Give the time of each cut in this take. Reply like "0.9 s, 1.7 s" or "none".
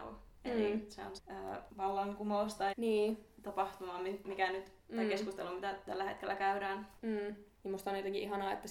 1.2 s, 2.7 s